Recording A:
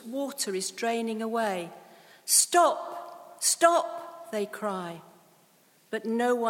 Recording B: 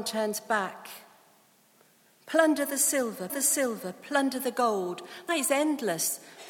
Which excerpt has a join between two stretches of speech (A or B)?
B